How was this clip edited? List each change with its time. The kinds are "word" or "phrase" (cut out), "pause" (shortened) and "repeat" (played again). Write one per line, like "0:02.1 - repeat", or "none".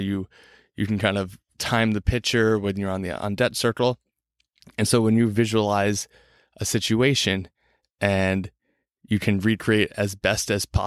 none